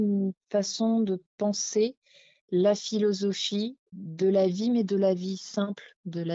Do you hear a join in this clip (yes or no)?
no